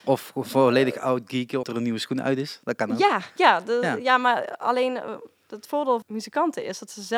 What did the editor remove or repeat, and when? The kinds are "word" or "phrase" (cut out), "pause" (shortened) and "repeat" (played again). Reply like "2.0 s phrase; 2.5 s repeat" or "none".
1.6 s word; 6.0 s word